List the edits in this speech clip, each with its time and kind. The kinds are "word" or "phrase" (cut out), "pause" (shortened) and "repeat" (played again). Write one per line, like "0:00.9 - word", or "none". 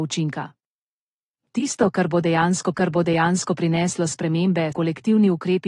0:02.7 - repeat
0:04.7 - word